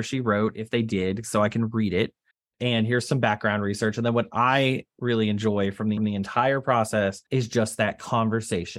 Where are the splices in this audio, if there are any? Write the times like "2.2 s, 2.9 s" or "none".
2.3 s, 6.0 s, 7.3 s